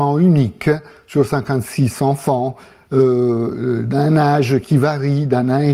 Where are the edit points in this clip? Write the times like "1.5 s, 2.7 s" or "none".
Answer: none